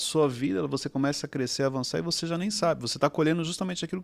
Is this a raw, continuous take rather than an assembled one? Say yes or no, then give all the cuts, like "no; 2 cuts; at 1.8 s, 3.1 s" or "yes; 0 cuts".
yes; 0 cuts